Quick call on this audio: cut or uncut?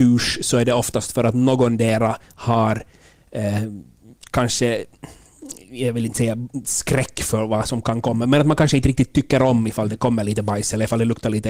uncut